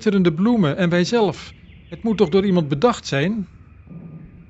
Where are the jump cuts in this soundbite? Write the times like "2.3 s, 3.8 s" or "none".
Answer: none